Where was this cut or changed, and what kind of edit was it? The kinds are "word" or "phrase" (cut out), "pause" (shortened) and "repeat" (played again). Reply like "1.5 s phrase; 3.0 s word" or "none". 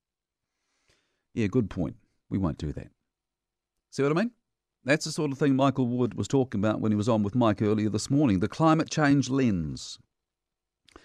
none